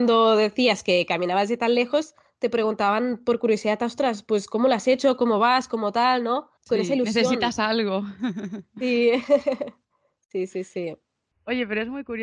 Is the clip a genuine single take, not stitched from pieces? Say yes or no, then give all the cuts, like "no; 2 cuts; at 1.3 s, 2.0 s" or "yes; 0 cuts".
no; 1 cut; at 6.6 s